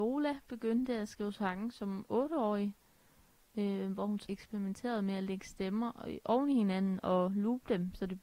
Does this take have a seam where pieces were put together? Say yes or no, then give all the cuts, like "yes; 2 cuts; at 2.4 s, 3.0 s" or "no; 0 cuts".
yes; 1 cut; at 4.3 s